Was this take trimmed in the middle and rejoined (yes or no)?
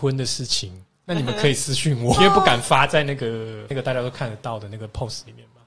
yes